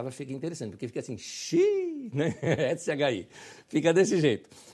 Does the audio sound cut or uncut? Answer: uncut